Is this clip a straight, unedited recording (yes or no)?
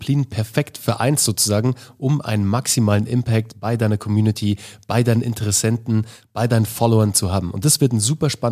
yes